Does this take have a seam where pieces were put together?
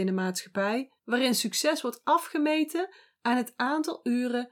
yes; 1 cut; at 1.0 s

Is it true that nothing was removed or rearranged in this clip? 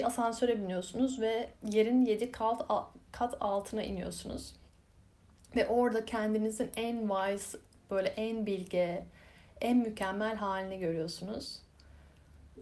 no; 1 cut; at 1.6 s

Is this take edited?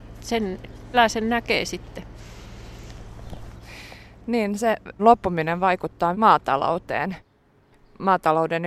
yes; 3 cuts; at 0.9 s, 5.0 s, 6.1 s

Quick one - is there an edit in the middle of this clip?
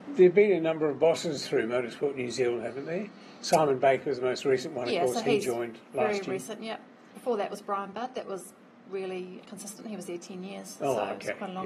yes; 1 cut; at 9.4 s

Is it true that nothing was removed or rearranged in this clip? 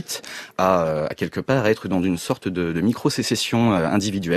yes; 0 cuts

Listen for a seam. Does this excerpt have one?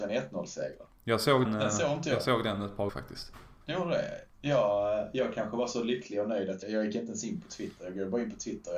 yes; 4 cuts; at 1.4 s, 2.9 s, 3.6 s, 6.6 s

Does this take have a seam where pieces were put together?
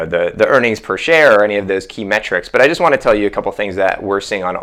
no; 0 cuts

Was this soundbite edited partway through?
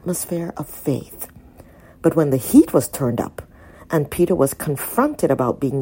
no; 0 cuts

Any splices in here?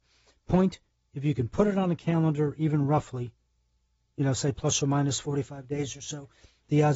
no; 0 cuts

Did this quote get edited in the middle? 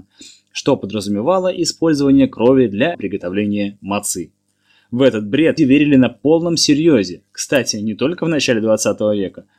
yes; 3 cuts; at 2.9 s, 5.6 s, 7.3 s

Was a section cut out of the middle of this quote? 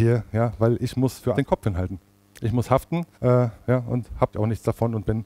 yes; 3 cuts; at 1.3 s, 3.1 s, 4.3 s

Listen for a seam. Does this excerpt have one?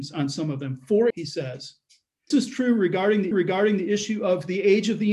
yes; 3 cuts; at 1.1 s, 2.3 s, 3.3 s

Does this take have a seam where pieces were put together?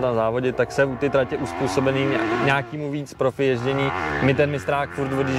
yes; 1 cut; at 3.1 s

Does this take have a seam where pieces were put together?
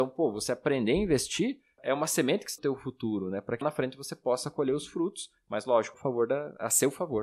yes; 4 cuts; at 1.8 s, 2.6 s, 3.6 s, 5.9 s

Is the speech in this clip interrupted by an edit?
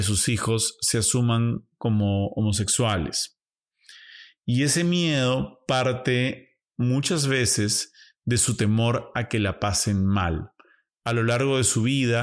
no; 0 cuts

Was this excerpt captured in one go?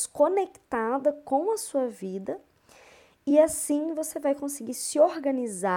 yes; 0 cuts

